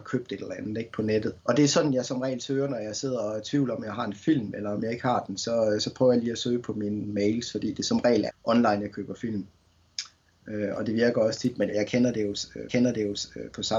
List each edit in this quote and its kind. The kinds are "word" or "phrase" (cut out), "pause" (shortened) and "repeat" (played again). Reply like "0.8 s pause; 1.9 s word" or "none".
1.4 s pause; 8.3 s word; 11.7 s word; 12.7 s repeat